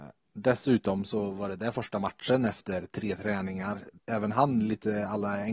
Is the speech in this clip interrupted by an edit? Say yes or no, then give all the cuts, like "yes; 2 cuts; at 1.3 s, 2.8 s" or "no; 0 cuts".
yes; 1 cut; at 4.0 s